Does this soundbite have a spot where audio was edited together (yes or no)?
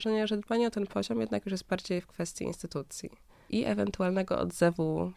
no